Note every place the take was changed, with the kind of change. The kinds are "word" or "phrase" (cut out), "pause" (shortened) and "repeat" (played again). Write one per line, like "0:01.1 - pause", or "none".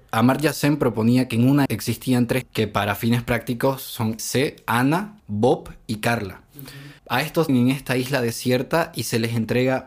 0:01.7 - word
0:02.4 - word
0:04.2 - phrase
0:05.2 - pause
0:07.0 - pause
0:07.5 - phrase